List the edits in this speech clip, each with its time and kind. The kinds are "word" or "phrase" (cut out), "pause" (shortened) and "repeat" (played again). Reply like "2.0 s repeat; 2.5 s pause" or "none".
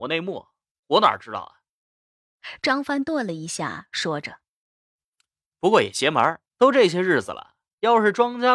6.5 s pause